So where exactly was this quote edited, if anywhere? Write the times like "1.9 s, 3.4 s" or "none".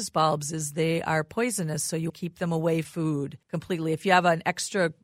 2.1 s, 2.8 s, 3.4 s